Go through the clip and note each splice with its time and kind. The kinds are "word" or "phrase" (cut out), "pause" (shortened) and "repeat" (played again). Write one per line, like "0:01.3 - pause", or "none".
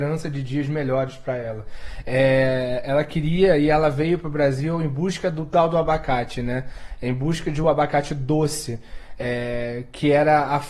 none